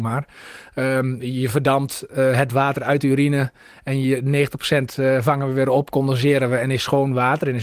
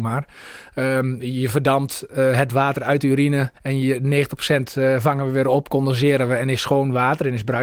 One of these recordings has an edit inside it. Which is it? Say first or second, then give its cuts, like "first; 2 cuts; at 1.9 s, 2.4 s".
second; 1 cut; at 3.6 s